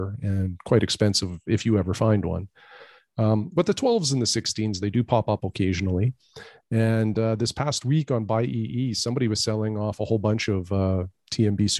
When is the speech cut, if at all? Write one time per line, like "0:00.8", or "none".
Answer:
none